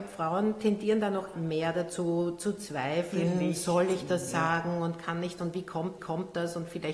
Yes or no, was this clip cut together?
yes